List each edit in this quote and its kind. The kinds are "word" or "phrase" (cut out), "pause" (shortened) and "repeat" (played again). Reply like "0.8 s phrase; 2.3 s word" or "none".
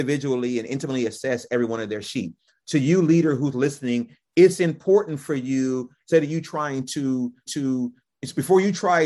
7.5 s repeat